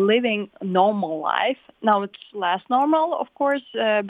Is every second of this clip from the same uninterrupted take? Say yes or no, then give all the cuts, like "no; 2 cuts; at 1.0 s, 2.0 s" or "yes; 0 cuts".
yes; 0 cuts